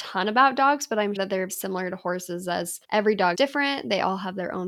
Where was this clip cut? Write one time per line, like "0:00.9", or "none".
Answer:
0:01.2
0:01.5
0:02.8
0:03.3

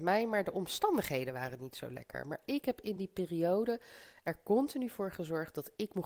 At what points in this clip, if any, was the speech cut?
none

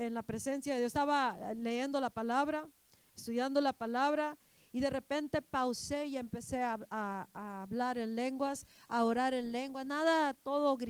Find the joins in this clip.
none

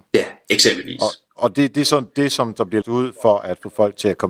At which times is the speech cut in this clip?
0:01.3
0:02.8

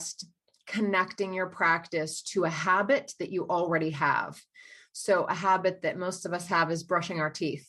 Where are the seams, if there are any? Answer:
none

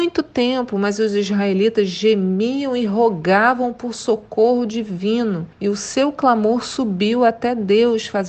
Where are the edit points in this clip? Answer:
0:05.5

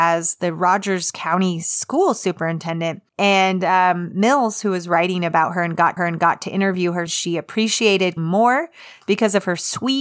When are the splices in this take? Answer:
0:03.1
0:06.0
0:07.1
0:08.2

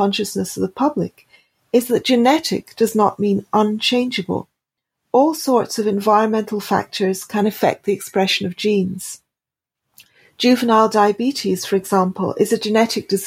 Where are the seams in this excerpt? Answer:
none

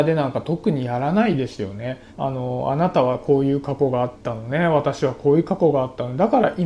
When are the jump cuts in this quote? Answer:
0:02.1
0:04.2

